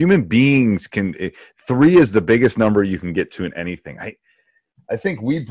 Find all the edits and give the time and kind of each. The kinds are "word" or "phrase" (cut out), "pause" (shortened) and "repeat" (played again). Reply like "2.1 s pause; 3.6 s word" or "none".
none